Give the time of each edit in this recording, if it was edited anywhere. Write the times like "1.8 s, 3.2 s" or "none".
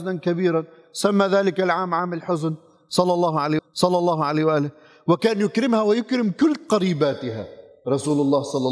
3.6 s